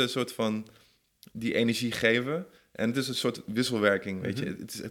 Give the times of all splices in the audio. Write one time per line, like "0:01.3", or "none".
none